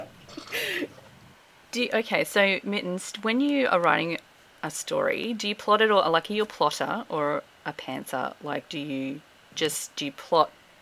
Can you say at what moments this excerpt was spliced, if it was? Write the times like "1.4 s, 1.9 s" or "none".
none